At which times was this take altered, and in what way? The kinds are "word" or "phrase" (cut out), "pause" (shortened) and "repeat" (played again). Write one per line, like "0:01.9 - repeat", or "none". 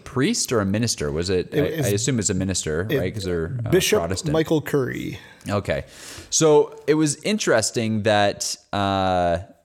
0:06.8 - word